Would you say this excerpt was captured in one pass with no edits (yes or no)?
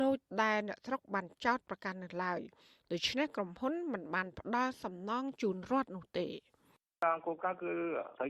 yes